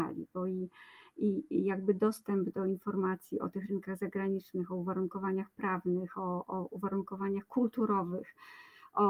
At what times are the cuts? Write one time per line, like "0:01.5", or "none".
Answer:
none